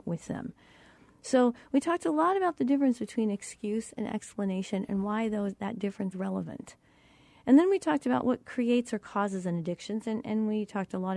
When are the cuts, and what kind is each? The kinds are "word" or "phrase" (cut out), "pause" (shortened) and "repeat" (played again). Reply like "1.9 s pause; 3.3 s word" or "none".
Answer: 6.1 s word; 8.2 s word